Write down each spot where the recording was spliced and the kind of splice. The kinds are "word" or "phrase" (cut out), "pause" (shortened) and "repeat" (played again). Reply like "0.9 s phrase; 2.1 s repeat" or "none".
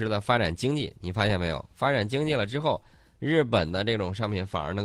none